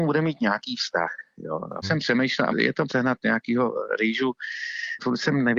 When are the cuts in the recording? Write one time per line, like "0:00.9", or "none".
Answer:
0:01.8
0:02.5
0:02.9